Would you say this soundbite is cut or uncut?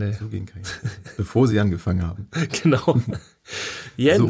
uncut